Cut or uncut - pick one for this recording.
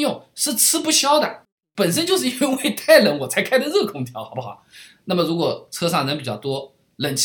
uncut